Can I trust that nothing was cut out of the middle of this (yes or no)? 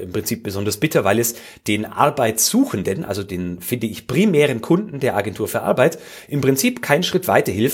yes